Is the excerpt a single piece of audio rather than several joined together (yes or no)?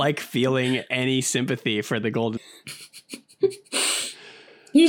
no